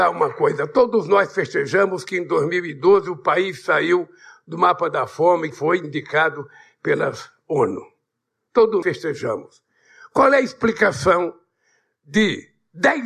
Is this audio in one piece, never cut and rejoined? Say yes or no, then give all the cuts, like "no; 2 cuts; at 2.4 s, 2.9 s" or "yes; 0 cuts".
no; 2 cuts; at 5.5 s, 8.8 s